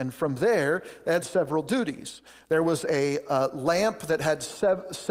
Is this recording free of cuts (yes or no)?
yes